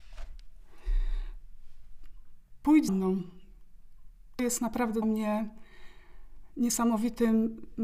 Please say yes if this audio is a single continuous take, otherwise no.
no